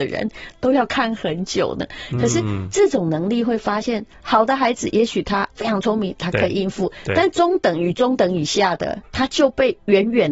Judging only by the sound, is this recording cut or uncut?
cut